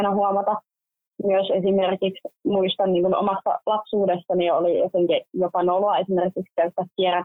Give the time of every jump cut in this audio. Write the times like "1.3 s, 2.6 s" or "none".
2.4 s